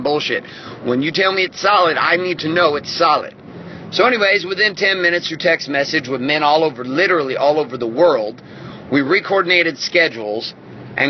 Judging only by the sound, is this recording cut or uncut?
uncut